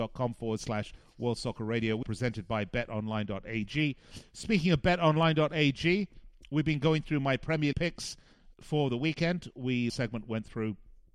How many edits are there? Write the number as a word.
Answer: four